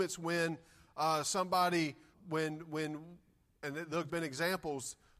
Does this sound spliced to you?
yes; 2 cuts; at 2.1 s, 4.1 s

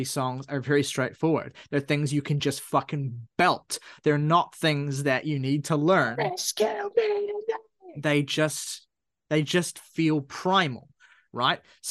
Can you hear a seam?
no; 0 cuts

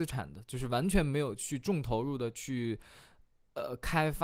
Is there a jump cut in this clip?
no; 0 cuts

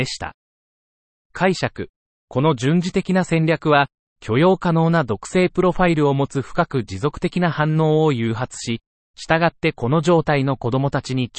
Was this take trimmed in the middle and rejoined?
no; 0 cuts

